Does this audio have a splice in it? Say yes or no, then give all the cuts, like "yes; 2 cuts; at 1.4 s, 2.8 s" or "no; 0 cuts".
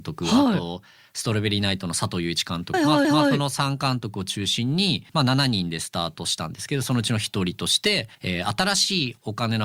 yes; 4 cuts; at 2.7 s, 3.0 s, 5.1 s, 8.1 s